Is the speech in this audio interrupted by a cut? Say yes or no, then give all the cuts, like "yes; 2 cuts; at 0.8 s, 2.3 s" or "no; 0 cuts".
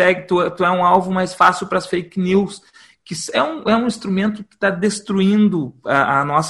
no; 0 cuts